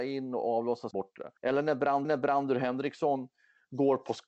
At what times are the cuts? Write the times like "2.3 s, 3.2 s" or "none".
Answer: 0.9 s, 1.4 s, 2.0 s